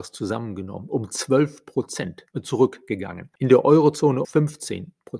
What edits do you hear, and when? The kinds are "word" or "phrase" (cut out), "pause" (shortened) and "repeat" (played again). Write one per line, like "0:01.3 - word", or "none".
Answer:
0:03.3 - pause
0:04.2 - word